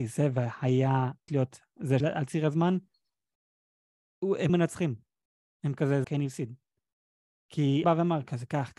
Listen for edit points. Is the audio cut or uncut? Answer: cut